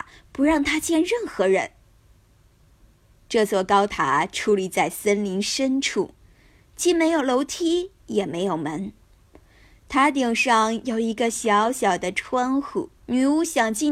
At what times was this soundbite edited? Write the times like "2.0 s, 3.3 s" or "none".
13.0 s